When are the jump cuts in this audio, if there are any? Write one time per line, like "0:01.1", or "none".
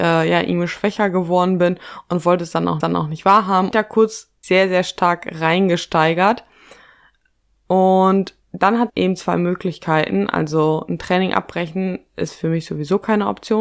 0:02.8
0:03.7
0:04.4
0:08.4
0:08.9

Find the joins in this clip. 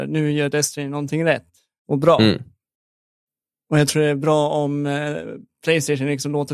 none

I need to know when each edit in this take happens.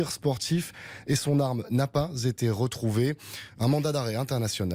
none

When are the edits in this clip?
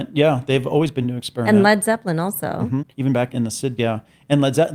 0:01.0
0:02.9
0:03.3
0:03.8

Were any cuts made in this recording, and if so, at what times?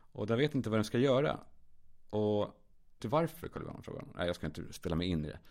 0:03.0

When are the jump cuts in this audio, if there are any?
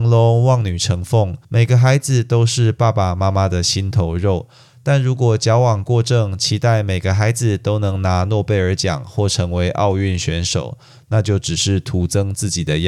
0:01.4

